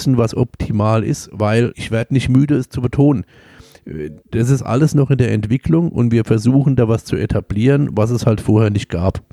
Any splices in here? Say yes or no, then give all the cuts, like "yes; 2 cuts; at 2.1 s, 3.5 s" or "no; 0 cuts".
yes; 2 cuts; at 1.7 s, 4.2 s